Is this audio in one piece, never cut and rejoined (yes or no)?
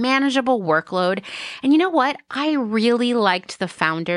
yes